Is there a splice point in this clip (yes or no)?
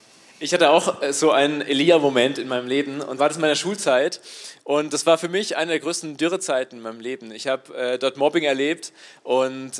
yes